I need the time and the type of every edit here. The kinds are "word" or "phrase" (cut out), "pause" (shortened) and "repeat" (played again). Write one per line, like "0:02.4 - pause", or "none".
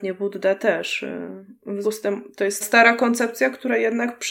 0:01.8 - word
0:02.6 - word